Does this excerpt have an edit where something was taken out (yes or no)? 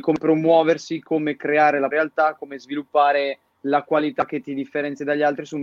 yes